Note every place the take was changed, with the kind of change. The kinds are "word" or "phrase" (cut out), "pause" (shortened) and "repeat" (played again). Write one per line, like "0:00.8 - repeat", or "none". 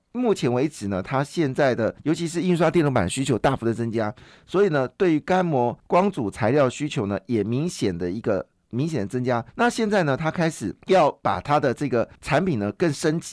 0:02.0 - pause
0:05.8 - pause
0:09.5 - pause
0:10.8 - pause
0:12.2 - pause